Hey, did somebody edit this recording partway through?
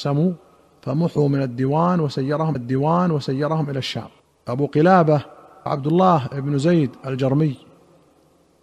yes; 3 cuts; at 2.6 s, 4.2 s, 5.7 s

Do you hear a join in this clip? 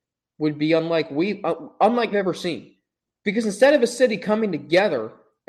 yes; 2 cuts; at 2.1 s, 3.0 s

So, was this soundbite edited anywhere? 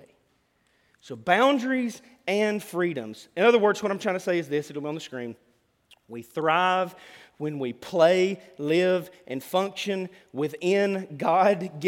no; 0 cuts

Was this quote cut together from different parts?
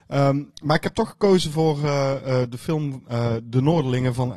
no; 0 cuts

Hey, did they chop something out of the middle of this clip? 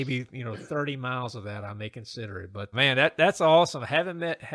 yes; 1 cut; at 2.7 s

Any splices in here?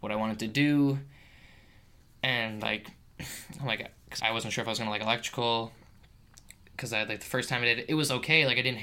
yes; 1 cut; at 4.2 s

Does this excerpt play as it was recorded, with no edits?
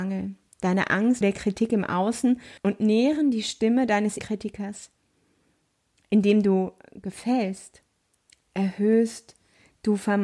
no; 4 cuts; at 1.2 s, 2.6 s, 4.2 s, 8.0 s

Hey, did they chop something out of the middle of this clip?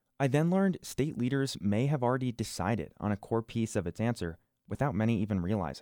no; 0 cuts

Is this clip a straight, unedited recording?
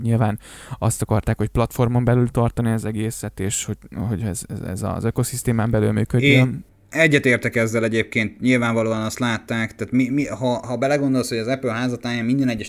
yes; 0 cuts

